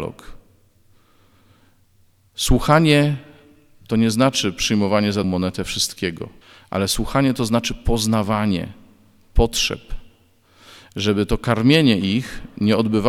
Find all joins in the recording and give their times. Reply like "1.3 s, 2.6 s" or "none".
5.2 s, 6.4 s